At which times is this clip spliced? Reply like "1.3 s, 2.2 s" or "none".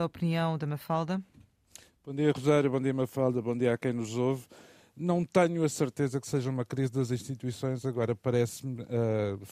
none